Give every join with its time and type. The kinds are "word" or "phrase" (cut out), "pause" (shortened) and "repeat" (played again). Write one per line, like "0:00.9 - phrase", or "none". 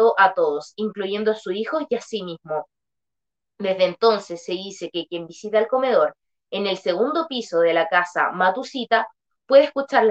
none